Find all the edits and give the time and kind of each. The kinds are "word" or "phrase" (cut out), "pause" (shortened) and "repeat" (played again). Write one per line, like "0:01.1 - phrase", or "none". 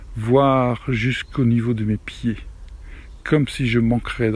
none